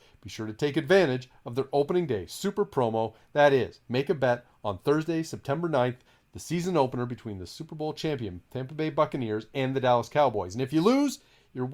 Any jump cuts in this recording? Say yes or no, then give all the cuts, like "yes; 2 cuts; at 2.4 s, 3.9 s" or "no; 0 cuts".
no; 0 cuts